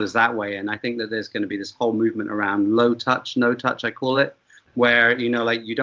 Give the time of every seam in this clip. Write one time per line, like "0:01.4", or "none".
none